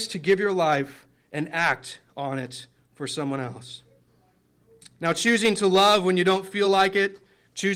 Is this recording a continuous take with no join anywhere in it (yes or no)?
yes